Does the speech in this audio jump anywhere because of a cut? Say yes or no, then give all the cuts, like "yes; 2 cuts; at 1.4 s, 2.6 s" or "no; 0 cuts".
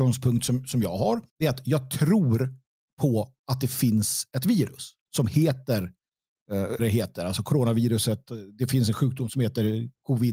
yes; 3 cuts; at 1.3 s, 5.0 s, 6.8 s